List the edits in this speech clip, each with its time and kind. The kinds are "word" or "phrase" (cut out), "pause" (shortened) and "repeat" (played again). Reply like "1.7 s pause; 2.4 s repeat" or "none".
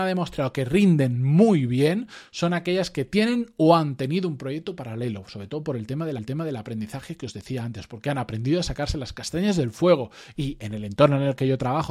6.2 s repeat